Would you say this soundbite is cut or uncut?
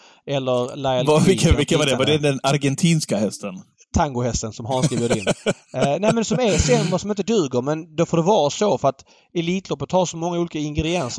uncut